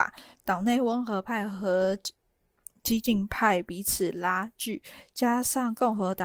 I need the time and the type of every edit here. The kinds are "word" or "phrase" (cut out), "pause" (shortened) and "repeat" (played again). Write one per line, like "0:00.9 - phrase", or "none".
none